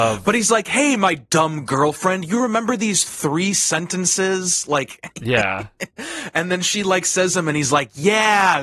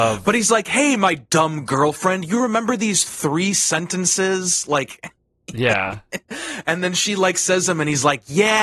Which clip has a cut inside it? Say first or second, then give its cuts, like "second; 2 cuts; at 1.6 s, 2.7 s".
first; 1 cut; at 5.1 s